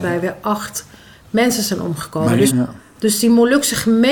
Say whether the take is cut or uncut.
cut